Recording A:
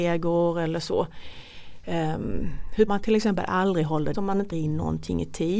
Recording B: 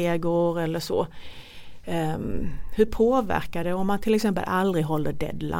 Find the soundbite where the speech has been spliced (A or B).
A